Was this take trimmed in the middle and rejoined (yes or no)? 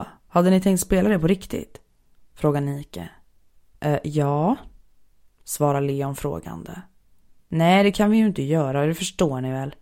no